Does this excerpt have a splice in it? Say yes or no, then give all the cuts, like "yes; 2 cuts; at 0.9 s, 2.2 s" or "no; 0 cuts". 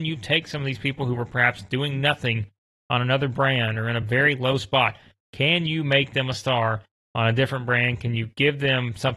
no; 0 cuts